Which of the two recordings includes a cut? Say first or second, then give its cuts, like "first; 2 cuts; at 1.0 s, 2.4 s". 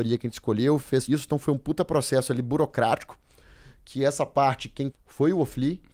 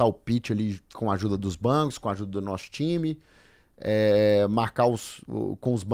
first; 2 cuts; at 1.1 s, 4.9 s